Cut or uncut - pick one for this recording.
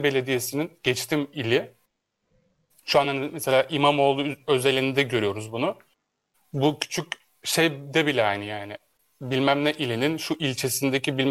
uncut